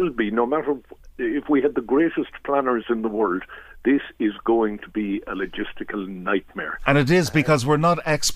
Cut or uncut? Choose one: uncut